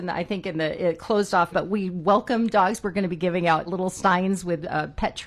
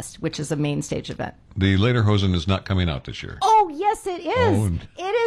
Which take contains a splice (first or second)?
first